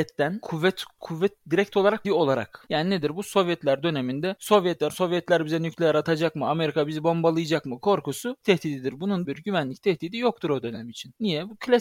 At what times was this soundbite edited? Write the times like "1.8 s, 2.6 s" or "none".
1.0 s, 2.0 s, 4.9 s, 8.4 s, 9.2 s

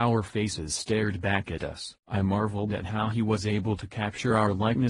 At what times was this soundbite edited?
2.0 s

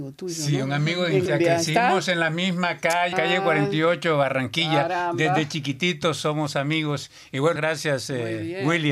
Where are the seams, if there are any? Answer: 1.3 s, 3.1 s, 7.6 s

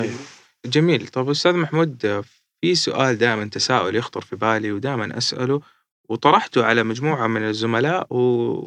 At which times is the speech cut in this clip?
none

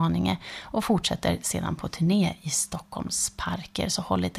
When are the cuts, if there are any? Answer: none

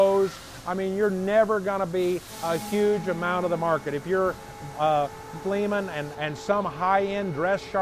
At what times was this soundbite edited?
4.7 s, 5.4 s, 6.1 s

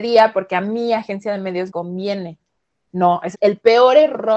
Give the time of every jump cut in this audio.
1.7 s, 3.3 s

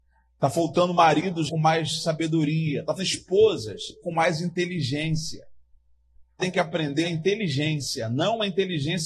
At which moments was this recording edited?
1.5 s, 3.0 s, 4.0 s, 6.4 s, 7.0 s

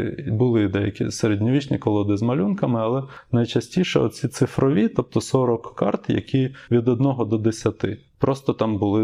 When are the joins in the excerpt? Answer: none

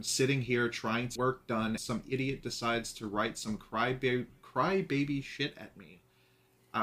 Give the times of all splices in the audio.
1.2 s, 1.8 s

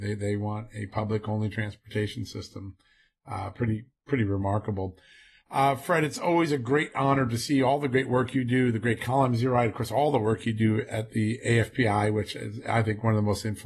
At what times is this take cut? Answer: none

